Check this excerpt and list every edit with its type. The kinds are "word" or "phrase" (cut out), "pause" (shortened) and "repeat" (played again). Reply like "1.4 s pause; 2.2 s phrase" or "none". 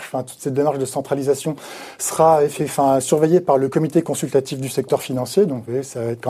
none